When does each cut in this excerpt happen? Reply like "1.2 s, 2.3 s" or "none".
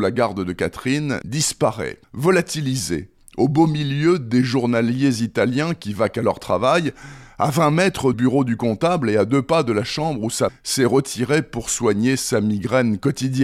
1.2 s, 2.0 s, 8.1 s, 10.5 s